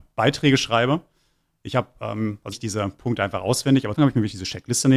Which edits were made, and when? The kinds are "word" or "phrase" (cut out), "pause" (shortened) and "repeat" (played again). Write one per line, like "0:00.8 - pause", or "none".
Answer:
0:02.5 - phrase
0:03.9 - phrase